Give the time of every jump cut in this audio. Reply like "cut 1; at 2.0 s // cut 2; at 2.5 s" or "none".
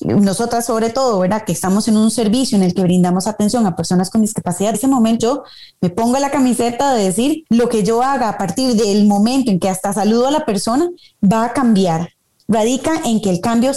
cut 1; at 4.7 s // cut 2; at 5.2 s // cut 3; at 7.5 s

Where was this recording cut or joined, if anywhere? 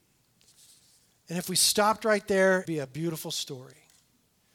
cut 1; at 2.7 s

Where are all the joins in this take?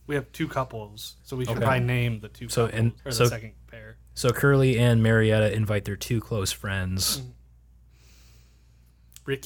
cut 1; at 1.2 s // cut 2; at 3.0 s

